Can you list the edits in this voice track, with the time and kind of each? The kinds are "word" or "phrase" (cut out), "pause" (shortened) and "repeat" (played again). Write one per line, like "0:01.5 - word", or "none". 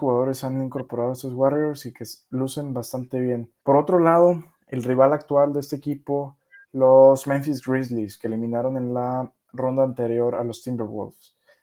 0:03.6 - pause
0:06.6 - pause